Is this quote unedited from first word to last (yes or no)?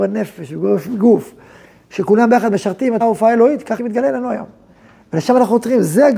no